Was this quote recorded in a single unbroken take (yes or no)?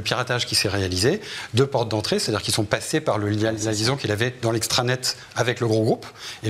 yes